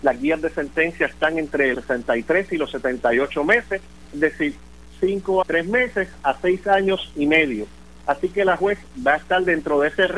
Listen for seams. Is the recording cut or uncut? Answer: cut